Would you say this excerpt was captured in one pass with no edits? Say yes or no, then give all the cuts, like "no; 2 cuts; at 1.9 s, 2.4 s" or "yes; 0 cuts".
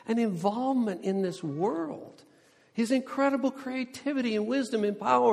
yes; 0 cuts